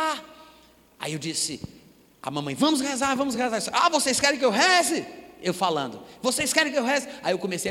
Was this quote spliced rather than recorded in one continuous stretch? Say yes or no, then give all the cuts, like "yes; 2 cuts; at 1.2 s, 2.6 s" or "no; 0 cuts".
no; 0 cuts